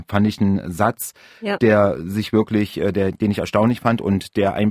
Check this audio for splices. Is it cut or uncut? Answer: uncut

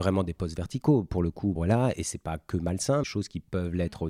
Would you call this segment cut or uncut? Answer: cut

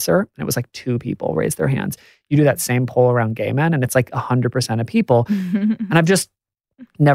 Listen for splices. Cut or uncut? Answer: uncut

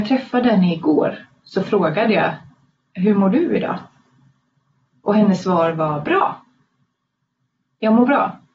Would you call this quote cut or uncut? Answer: uncut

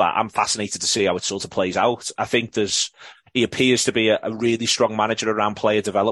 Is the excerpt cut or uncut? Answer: uncut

